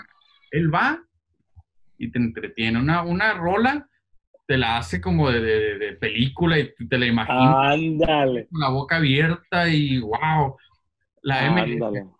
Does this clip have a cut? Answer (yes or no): no